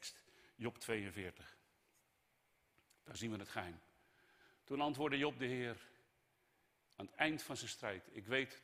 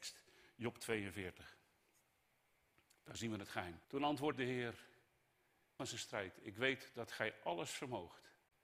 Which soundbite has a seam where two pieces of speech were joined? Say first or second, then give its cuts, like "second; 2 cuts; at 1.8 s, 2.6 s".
second; 3 cuts; at 3.8 s, 4.3 s, 5.8 s